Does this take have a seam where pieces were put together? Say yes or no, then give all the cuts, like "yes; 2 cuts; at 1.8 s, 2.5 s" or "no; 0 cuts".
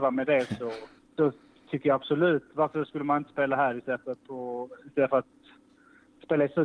yes; 1 cut; at 1.0 s